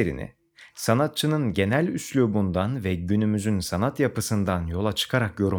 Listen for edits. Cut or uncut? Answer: uncut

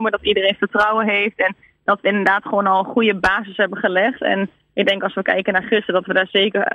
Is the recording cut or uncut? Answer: uncut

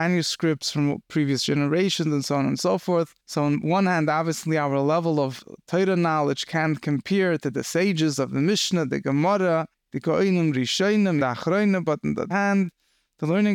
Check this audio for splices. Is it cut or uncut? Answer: cut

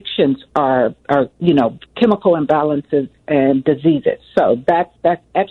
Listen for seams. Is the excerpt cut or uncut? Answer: cut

